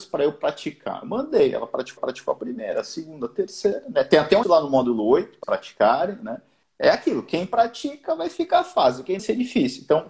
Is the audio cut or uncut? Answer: cut